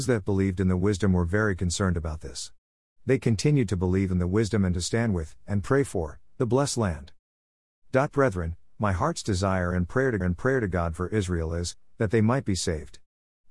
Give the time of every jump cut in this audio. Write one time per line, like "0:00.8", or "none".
0:10.2

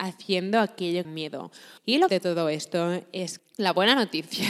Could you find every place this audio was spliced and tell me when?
0:01.0
0:01.8
0:02.1
0:03.4

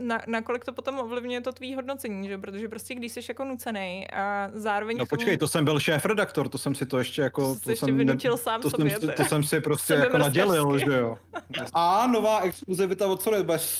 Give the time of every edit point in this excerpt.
0:11.7

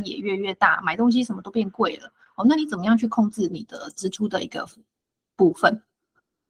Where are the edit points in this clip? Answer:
none

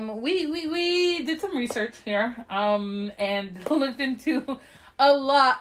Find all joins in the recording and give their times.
none

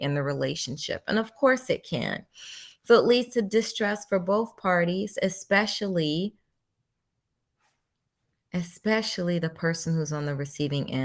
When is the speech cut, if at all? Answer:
none

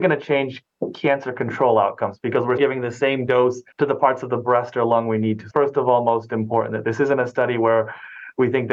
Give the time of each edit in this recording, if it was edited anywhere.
0:02.6
0:03.7
0:05.5

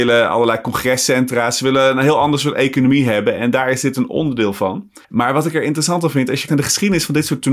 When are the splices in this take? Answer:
0:05.0
0:06.5

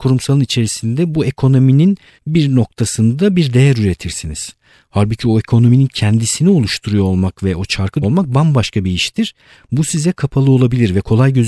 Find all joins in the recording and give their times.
0:08.0

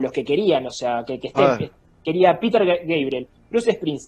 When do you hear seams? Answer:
none

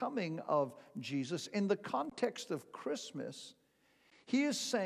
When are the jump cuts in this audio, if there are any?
none

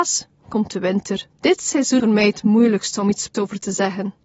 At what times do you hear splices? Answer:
0:01.3
0:02.0
0:03.3

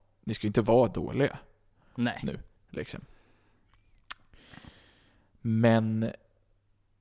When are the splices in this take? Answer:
none

